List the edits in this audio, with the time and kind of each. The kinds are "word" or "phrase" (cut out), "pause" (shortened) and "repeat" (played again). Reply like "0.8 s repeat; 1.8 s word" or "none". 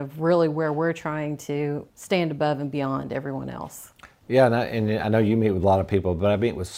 1.9 s word